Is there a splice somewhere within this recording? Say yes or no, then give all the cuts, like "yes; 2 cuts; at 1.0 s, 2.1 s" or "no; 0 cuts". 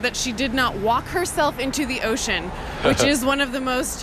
no; 0 cuts